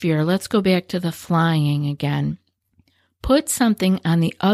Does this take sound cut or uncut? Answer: uncut